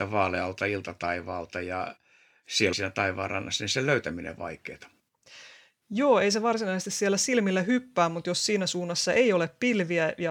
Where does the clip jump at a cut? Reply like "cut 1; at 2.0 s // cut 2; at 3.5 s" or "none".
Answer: cut 1; at 2.7 s // cut 2; at 4.4 s